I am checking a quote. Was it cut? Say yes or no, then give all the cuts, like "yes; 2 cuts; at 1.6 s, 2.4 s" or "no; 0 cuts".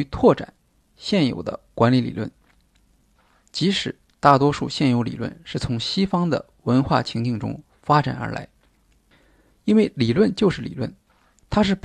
no; 0 cuts